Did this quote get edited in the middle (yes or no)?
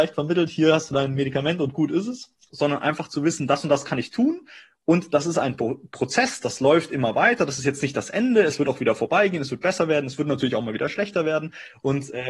no